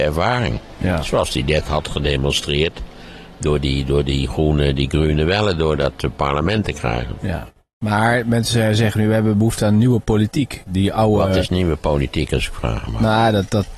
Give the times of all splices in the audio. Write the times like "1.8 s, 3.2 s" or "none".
none